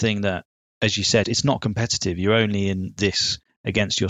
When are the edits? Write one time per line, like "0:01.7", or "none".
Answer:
0:01.2

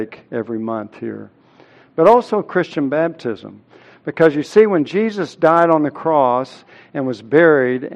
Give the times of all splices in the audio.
none

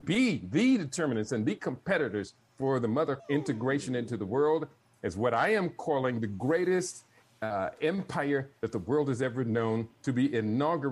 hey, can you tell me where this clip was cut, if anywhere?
0:03.2

